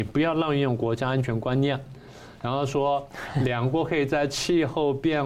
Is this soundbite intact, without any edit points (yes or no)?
yes